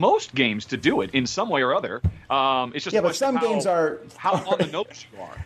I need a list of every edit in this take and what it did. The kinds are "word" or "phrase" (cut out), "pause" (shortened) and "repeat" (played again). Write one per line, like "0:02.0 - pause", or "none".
none